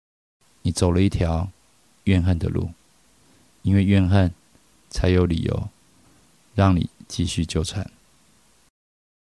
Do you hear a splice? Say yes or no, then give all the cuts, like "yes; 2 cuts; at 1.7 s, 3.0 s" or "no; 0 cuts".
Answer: no; 0 cuts